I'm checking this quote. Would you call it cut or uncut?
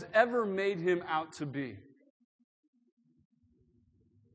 uncut